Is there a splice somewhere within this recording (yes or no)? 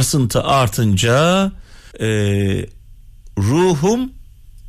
yes